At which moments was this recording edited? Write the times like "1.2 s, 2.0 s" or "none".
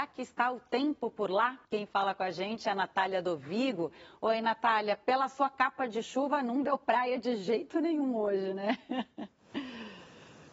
1.6 s